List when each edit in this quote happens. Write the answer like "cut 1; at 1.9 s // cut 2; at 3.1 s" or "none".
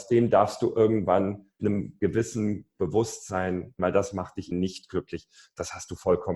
cut 1; at 1.6 s // cut 2; at 3.8 s // cut 3; at 4.5 s